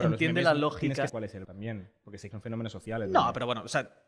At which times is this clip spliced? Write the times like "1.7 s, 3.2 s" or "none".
1.1 s, 1.4 s, 2.3 s